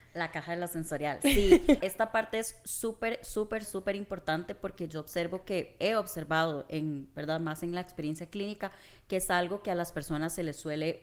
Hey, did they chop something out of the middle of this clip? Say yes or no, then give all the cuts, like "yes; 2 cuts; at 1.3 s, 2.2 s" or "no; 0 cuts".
yes; 2 cuts; at 1.8 s, 3.6 s